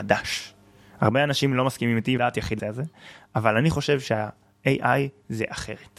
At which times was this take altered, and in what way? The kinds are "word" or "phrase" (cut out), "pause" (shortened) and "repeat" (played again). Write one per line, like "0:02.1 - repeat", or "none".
0:02.2 - word
0:02.6 - word